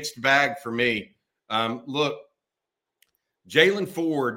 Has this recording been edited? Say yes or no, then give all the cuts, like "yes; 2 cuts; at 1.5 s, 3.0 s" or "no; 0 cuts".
no; 0 cuts